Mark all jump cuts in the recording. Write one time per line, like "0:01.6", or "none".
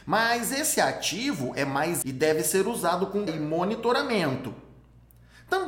0:02.0
0:03.3